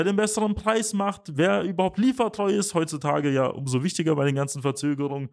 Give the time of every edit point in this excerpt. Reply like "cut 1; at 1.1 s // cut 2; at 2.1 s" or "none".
none